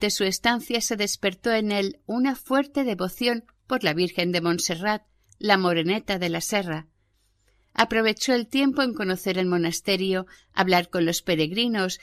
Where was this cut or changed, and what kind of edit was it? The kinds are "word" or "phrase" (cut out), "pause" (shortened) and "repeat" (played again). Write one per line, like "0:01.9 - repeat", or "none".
none